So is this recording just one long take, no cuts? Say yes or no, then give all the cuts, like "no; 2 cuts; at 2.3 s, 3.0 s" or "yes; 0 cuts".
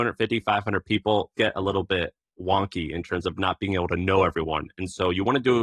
no; 1 cut; at 1.3 s